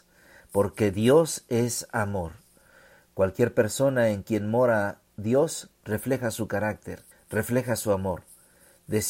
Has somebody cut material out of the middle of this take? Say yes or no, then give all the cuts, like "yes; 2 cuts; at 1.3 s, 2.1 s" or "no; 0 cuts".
yes; 1 cut; at 7.1 s